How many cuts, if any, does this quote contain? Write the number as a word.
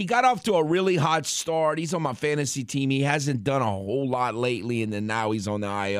zero